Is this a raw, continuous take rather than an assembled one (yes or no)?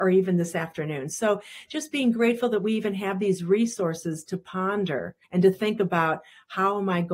no